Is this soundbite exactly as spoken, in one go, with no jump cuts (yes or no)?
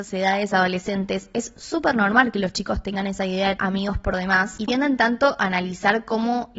no